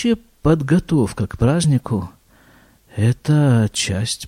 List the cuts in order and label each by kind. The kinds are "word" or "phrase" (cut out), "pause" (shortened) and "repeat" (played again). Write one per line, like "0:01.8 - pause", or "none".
none